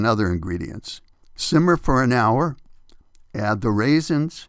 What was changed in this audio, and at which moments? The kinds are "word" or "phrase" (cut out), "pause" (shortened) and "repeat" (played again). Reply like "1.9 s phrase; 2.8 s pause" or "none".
1.1 s pause